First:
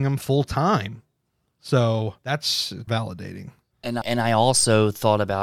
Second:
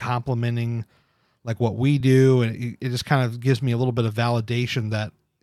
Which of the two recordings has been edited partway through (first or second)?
first